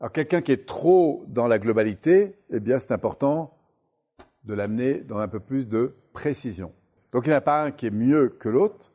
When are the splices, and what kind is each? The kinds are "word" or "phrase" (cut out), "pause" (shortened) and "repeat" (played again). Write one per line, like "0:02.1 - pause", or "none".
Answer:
none